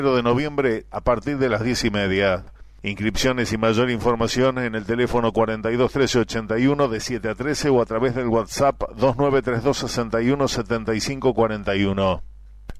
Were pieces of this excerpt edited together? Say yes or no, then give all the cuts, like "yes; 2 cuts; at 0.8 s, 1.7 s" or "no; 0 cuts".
no; 0 cuts